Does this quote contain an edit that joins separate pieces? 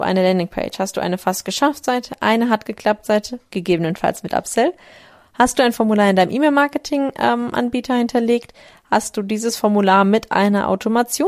no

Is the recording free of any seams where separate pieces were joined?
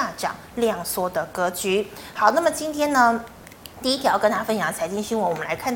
no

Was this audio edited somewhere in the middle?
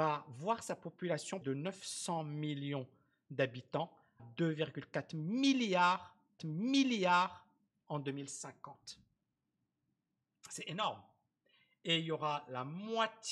yes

